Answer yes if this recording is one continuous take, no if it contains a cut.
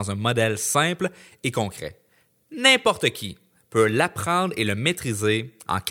yes